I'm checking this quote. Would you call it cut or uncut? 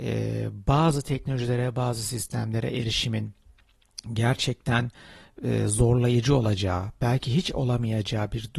uncut